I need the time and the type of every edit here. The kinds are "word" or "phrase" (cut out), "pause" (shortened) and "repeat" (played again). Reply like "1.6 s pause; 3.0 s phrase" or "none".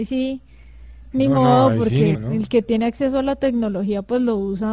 2.1 s word